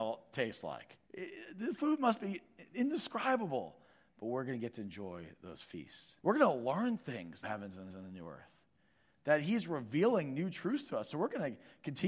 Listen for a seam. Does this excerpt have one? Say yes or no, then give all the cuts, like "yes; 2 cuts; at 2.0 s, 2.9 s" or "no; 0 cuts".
yes; 4 cuts; at 1.0 s, 6.2 s, 7.4 s, 7.9 s